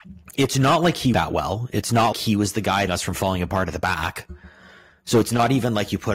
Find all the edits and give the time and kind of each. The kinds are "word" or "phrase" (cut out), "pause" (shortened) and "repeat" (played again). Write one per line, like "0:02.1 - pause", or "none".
0:01.1 - phrase
0:02.1 - word
0:02.9 - phrase